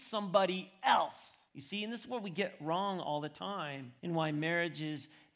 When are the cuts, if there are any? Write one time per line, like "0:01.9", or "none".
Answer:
0:01.5
0:04.0